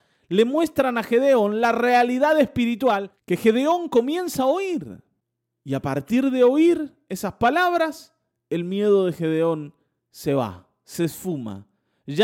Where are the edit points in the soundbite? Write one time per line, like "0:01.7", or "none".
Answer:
none